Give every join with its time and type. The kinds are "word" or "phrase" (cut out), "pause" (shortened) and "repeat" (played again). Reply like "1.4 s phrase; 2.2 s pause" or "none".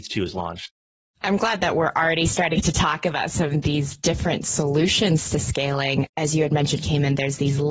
none